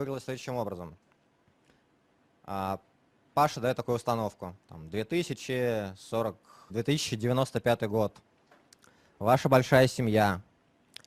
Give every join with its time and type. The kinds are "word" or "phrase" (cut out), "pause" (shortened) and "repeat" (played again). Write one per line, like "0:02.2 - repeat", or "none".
0:03.1 - pause
0:04.6 - pause
0:06.7 - phrase